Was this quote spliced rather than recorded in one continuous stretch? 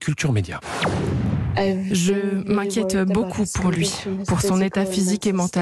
no; 0 cuts

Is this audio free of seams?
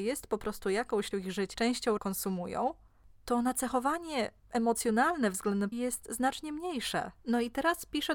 no; 6 cuts; at 1.1 s, 1.5 s, 2.0 s, 4.4 s, 5.7 s, 7.2 s

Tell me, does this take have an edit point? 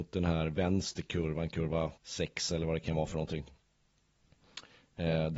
yes; 1 cut; at 2.0 s

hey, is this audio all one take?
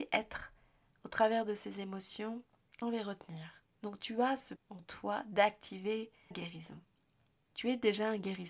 no; 3 cuts; at 2.8 s, 4.6 s, 6.3 s

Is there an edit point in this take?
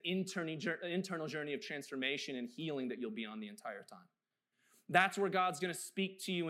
no; 0 cuts

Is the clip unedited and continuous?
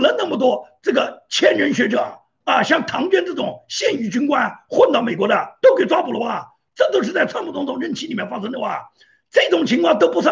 yes; 0 cuts

